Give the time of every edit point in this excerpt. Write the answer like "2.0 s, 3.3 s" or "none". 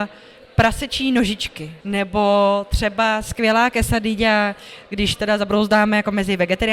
1.8 s